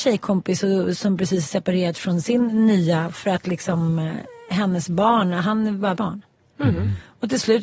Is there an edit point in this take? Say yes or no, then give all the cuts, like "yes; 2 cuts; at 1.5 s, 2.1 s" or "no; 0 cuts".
yes; 1 cut; at 6.0 s